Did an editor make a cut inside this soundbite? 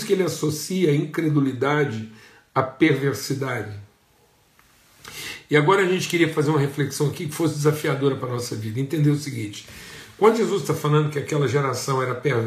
no; 0 cuts

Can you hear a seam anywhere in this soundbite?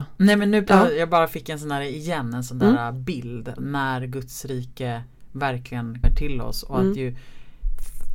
yes; 2 cuts; at 3.6 s, 6.0 s

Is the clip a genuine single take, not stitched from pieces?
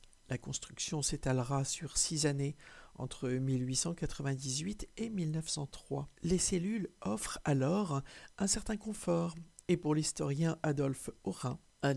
no; 1 cut; at 6.2 s

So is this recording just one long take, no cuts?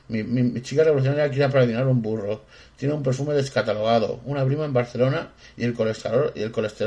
yes; 0 cuts

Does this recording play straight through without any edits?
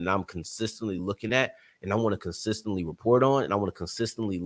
yes; 0 cuts

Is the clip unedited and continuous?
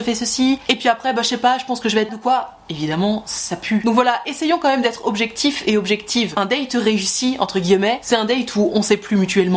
no; 1 cut; at 2.1 s

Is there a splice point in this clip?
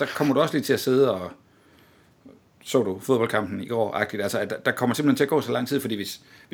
no; 0 cuts

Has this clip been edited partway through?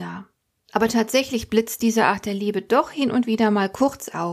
no; 0 cuts

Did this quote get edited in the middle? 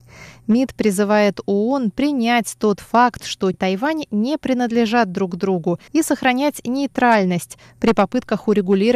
yes; 2 cuts; at 3.5 s, 5.9 s

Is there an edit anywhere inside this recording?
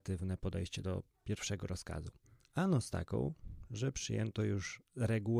no; 0 cuts

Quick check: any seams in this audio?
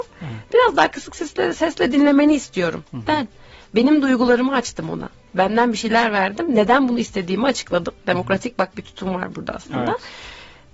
no; 0 cuts

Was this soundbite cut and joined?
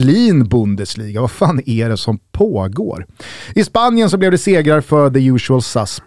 no; 0 cuts

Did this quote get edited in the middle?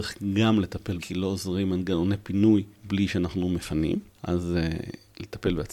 yes; 3 cuts; at 1.0 s, 2.7 s, 4.1 s

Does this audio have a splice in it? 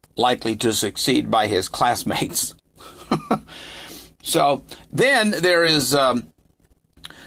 no; 0 cuts

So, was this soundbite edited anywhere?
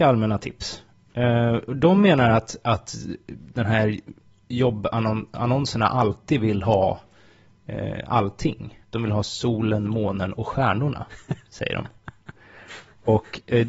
yes; 1 cut; at 8.8 s

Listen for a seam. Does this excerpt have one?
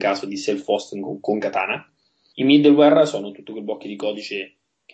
no; 0 cuts

